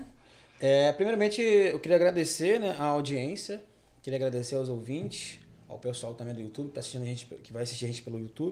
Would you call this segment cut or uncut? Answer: uncut